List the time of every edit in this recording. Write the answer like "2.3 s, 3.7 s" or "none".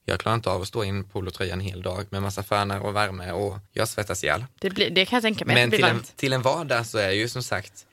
3.7 s, 4.5 s